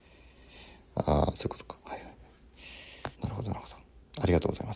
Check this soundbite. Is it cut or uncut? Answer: cut